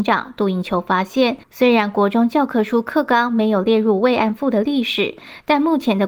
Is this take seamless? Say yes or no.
no